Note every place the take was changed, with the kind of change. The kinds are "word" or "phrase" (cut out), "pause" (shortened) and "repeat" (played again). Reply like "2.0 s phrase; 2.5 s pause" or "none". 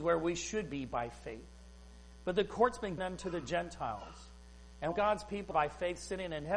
3.0 s word; 4.9 s word; 5.5 s word